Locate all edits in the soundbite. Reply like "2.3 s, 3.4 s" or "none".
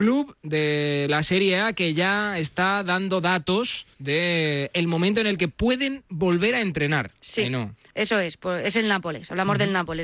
3.9 s